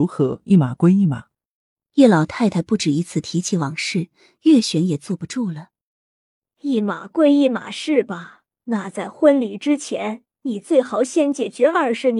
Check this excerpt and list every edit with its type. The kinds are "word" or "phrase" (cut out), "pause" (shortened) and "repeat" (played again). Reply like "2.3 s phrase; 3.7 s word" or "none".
8.5 s pause; 10.3 s pause